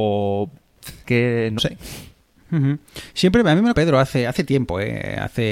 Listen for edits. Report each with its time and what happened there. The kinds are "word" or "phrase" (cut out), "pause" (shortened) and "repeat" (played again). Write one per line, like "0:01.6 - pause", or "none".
0:01.0 - word
0:01.6 - word
0:03.7 - word